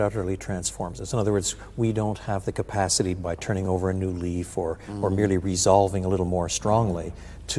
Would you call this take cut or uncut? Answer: uncut